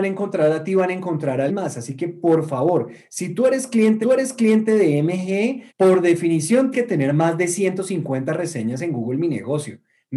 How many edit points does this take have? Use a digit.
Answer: 4